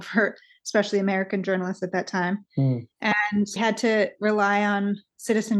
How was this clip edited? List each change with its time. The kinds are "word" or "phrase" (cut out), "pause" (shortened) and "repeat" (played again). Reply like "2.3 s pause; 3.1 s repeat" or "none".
3.6 s word